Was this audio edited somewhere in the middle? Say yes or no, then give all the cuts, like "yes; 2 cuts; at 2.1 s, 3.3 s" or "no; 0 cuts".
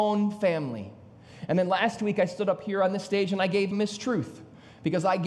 yes; 1 cut; at 3.7 s